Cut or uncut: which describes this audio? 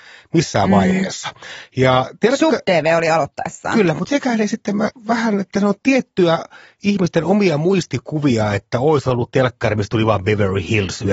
uncut